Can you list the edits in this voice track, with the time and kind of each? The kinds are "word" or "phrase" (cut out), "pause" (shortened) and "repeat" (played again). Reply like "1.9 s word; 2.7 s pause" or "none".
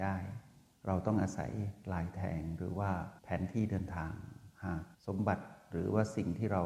3.2 s pause; 4.9 s pause